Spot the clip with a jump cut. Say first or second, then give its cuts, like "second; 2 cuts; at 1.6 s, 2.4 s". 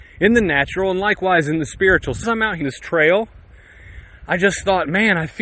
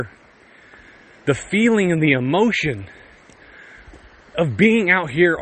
first; 2 cuts; at 2.2 s, 2.6 s